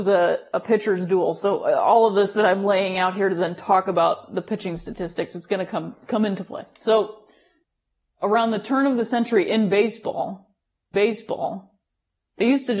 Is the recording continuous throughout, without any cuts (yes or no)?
no